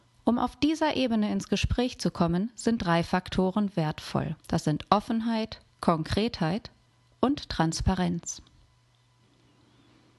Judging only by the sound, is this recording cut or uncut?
cut